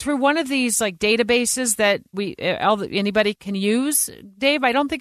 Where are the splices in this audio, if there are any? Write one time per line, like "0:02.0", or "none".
0:02.1
0:03.3